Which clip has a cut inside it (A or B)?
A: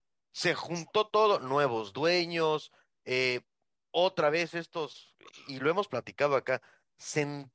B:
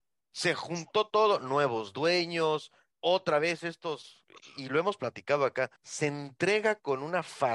B